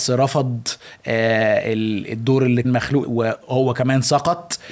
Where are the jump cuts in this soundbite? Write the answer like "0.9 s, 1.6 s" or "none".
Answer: 2.6 s, 3.0 s

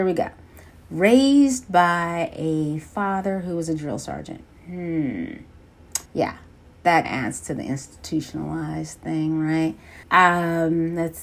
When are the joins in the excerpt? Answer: 6.1 s, 7.0 s, 10.0 s

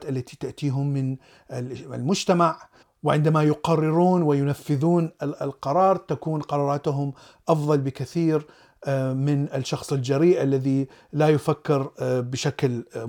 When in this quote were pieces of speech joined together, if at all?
none

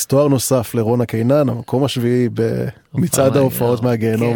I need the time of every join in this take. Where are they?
none

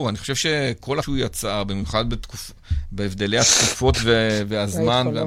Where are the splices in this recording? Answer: 1.0 s

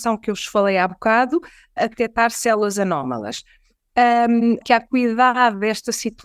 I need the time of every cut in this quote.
1.8 s, 4.6 s

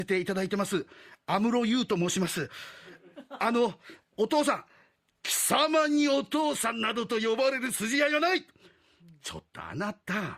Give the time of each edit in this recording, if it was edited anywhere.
none

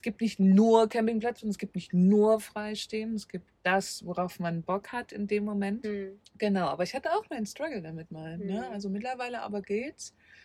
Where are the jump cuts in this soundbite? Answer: 6.2 s

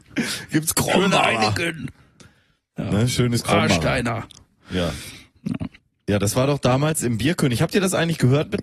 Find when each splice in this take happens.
2.0 s, 5.8 s

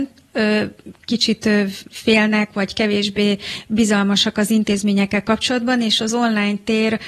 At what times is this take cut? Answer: none

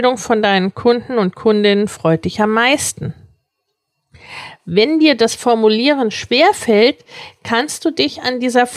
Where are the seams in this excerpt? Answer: none

